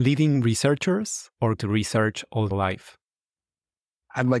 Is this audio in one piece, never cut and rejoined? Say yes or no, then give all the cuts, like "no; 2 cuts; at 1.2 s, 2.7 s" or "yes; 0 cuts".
no; 2 cuts; at 1.6 s, 2.5 s